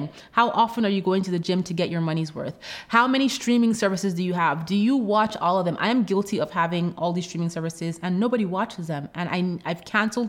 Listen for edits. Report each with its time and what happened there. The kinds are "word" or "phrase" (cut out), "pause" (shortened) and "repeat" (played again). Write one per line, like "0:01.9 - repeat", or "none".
none